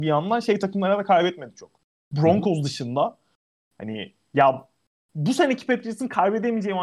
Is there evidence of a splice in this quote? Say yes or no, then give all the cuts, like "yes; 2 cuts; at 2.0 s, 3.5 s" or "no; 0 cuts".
yes; 1 cut; at 4.9 s